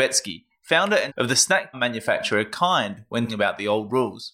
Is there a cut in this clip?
yes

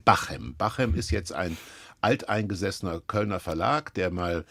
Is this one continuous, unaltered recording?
yes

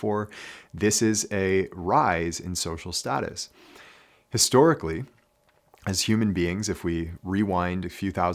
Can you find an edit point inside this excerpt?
no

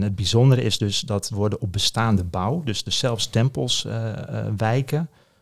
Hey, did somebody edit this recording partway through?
yes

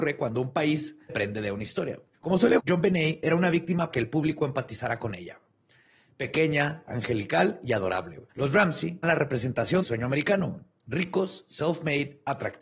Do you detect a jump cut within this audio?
yes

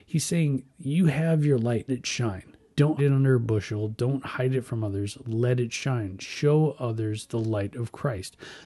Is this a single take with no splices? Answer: no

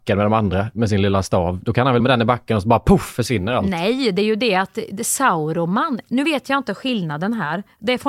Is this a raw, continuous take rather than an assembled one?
no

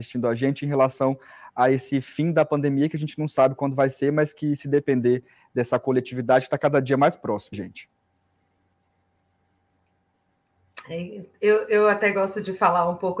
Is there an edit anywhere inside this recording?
yes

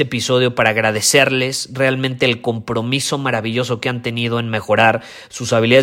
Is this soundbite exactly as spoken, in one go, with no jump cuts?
yes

